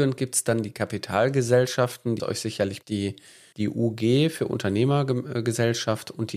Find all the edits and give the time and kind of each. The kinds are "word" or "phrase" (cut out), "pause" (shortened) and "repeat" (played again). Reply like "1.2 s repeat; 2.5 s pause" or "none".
2.2 s word; 2.8 s word; 3.5 s word